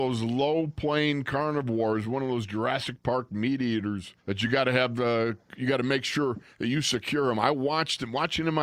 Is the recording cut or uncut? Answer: cut